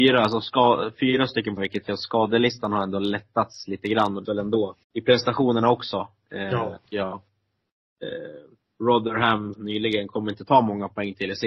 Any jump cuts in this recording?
yes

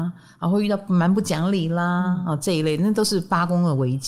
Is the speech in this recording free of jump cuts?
yes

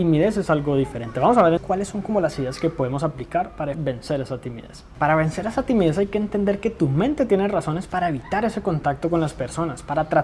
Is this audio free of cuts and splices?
no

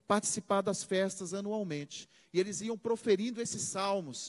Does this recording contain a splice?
no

